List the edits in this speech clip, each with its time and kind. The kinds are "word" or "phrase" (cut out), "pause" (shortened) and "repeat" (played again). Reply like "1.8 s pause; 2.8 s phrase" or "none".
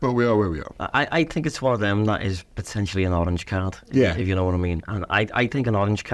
none